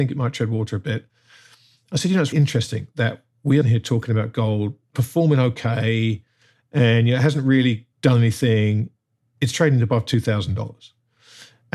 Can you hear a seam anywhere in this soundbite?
yes; 3 cuts; at 2.3 s, 3.6 s, 7.9 s

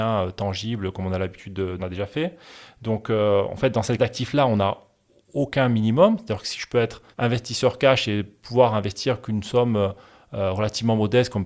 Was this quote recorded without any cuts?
no; 3 cuts; at 1.8 s, 4.0 s, 7.1 s

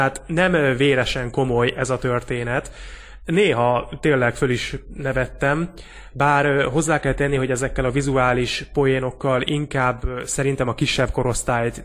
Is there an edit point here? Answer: no; 0 cuts

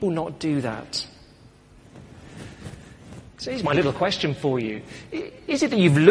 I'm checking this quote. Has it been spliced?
no; 0 cuts

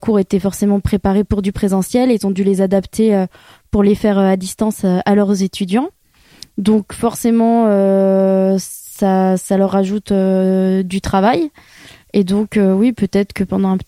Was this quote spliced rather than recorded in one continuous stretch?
no; 0 cuts

